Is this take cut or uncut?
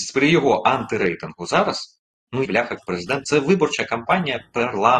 cut